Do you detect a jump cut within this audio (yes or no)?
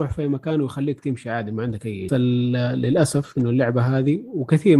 yes